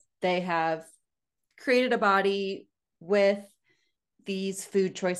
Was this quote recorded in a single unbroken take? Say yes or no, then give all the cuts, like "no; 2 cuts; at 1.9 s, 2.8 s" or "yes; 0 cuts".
yes; 0 cuts